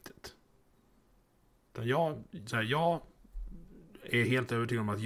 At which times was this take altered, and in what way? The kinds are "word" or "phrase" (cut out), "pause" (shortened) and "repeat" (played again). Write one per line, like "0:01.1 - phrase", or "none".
none